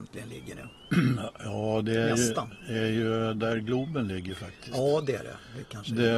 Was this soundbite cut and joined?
no; 0 cuts

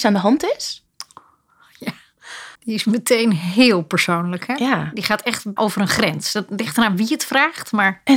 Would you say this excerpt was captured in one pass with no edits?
no; 2 cuts; at 2.5 s, 5.6 s

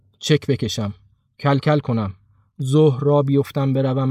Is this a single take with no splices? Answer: yes; 0 cuts

